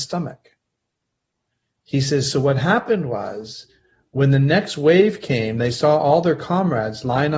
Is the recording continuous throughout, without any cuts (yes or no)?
yes